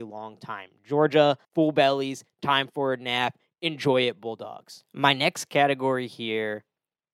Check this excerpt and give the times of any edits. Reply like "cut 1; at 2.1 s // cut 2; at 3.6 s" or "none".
cut 1; at 1.4 s